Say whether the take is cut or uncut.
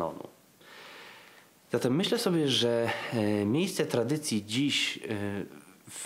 uncut